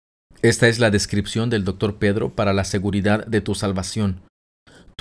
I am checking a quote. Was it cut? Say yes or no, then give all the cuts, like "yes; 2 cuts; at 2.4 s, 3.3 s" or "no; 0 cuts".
no; 0 cuts